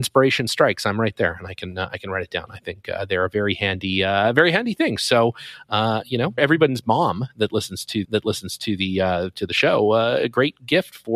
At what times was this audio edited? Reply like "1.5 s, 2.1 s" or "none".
6.4 s, 8.0 s